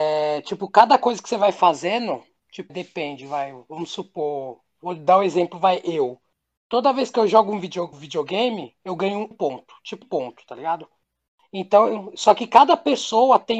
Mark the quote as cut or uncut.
cut